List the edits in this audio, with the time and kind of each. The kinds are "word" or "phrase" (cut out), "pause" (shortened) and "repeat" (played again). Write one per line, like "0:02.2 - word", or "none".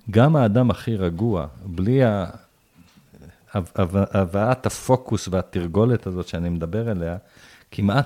none